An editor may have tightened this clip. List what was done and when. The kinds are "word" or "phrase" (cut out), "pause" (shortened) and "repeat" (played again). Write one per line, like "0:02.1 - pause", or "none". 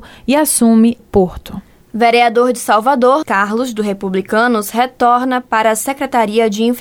0:01.0 - word
0:03.2 - word